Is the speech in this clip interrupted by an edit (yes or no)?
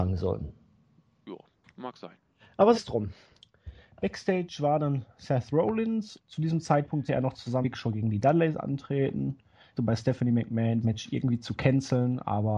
yes